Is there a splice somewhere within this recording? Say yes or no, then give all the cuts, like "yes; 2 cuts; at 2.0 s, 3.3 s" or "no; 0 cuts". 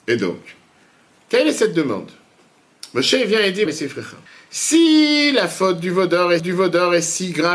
yes; 3 cuts; at 3.7 s, 4.3 s, 6.4 s